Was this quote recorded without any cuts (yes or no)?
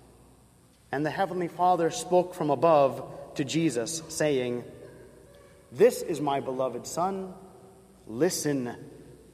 yes